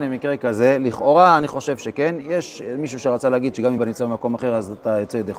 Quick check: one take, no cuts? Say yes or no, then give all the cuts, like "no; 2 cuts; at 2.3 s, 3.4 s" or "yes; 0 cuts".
no; 1 cut; at 3.8 s